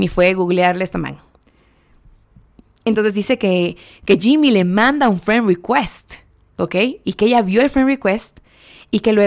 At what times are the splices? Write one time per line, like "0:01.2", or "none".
none